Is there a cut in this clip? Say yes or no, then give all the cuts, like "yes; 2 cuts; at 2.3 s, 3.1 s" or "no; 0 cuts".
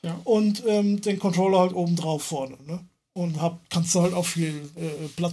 no; 0 cuts